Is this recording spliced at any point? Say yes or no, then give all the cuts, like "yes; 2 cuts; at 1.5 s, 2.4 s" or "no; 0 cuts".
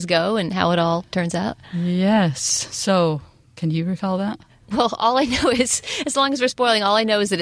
no; 0 cuts